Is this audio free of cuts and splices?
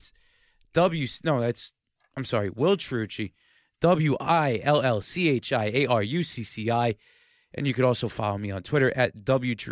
yes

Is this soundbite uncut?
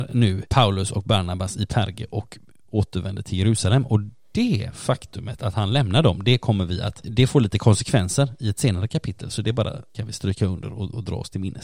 yes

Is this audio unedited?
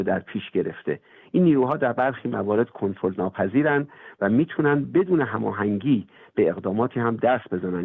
yes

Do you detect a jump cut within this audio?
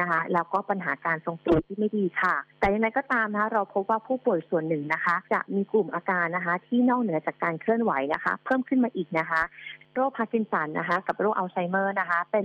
yes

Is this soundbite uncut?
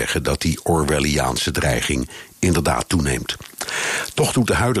yes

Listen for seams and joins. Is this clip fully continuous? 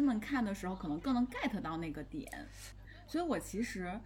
yes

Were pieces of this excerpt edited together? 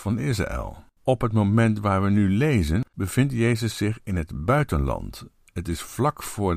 yes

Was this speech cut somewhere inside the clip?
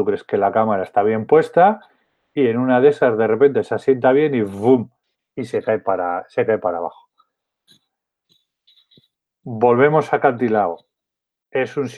no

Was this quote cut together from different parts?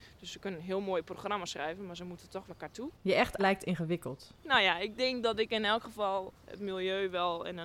yes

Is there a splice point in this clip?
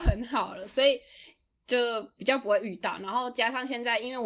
no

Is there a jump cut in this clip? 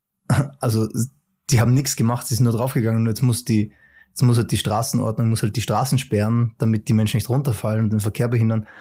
no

